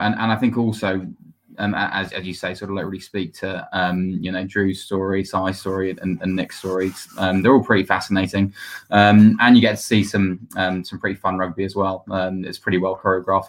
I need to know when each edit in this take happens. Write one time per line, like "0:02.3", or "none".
none